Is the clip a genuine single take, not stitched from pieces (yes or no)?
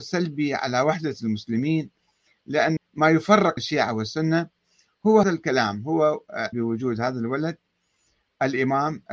no